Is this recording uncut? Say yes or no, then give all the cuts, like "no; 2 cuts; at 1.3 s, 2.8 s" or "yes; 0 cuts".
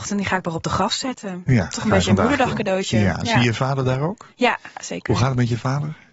no; 1 cut; at 4.7 s